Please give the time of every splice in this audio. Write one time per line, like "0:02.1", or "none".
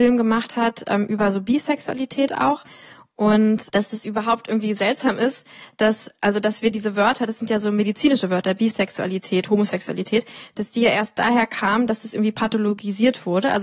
none

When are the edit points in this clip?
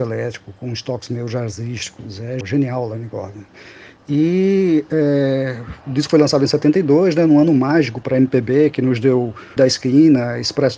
0:02.4
0:09.6

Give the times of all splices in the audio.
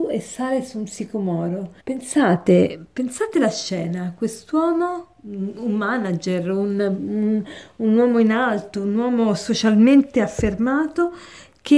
0:01.8

